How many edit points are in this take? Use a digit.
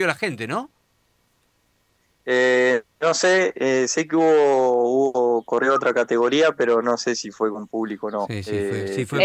0